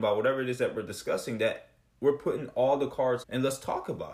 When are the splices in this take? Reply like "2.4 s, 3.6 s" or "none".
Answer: 3.2 s